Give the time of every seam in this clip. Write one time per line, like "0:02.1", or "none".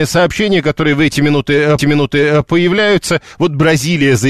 0:01.8